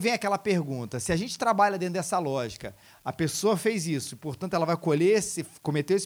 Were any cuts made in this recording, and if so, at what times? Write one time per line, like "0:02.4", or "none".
none